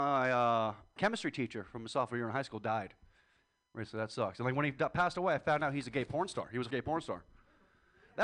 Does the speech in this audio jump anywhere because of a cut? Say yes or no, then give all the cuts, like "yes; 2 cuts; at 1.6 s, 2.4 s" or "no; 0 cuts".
yes; 2 cuts; at 1.0 s, 6.7 s